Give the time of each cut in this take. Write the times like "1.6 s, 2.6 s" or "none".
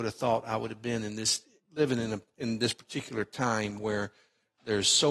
1.6 s